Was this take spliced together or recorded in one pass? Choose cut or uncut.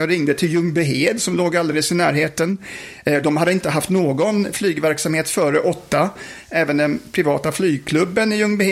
uncut